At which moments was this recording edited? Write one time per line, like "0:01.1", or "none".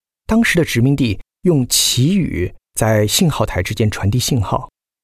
0:02.6